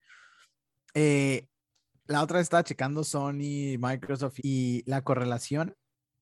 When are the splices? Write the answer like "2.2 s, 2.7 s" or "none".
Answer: 4.4 s

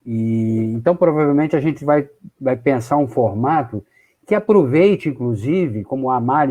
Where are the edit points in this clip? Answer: none

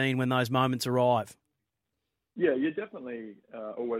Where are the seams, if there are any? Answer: none

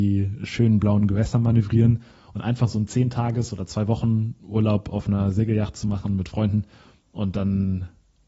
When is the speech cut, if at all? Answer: none

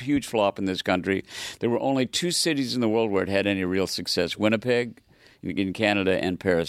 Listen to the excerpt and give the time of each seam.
none

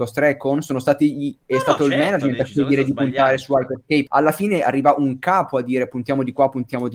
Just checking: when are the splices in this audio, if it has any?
4.1 s

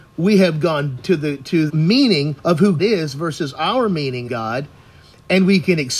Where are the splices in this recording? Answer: 1.0 s, 1.7 s, 2.4 s, 2.8 s, 4.3 s

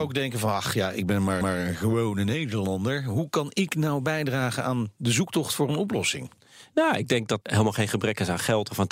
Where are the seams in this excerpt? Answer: 1.4 s, 7.4 s

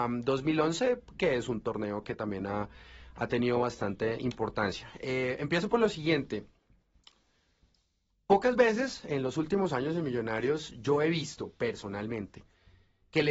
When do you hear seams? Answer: none

